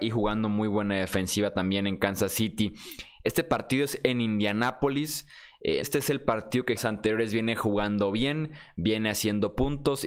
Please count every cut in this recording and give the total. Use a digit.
2